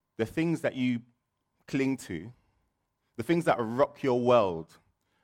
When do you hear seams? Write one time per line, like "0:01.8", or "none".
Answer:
none